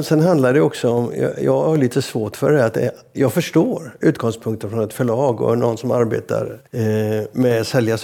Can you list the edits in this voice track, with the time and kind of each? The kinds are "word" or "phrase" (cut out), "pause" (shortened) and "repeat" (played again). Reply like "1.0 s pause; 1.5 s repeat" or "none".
6.7 s pause